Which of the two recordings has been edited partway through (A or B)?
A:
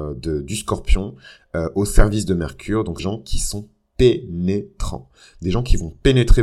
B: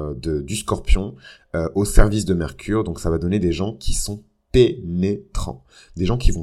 A